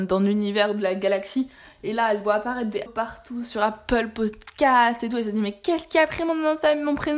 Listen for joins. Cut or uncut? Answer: cut